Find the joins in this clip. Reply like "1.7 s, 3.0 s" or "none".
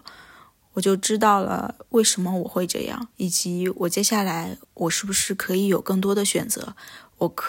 3.1 s, 4.6 s